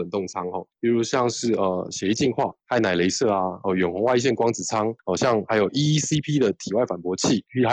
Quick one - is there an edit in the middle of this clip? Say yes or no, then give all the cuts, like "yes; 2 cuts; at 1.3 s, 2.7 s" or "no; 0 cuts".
no; 0 cuts